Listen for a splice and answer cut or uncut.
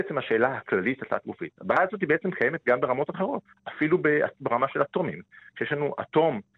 cut